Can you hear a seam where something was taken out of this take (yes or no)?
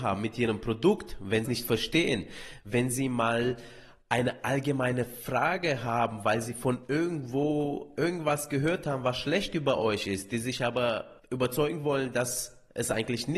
yes